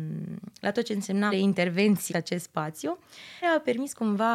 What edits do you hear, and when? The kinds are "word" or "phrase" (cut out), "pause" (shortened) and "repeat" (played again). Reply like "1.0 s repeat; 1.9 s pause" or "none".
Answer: 1.3 s word; 2.1 s word; 3.4 s word